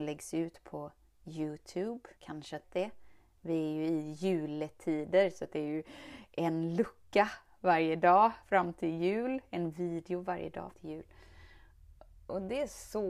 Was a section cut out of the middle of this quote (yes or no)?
yes